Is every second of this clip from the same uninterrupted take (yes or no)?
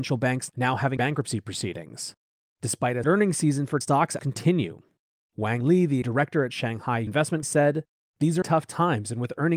no